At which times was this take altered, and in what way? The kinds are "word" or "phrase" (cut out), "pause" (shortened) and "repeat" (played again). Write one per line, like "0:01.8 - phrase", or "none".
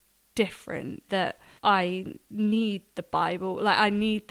0:01.1 - word
0:01.6 - pause